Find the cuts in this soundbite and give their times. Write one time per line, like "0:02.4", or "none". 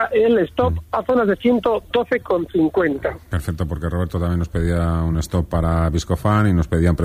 none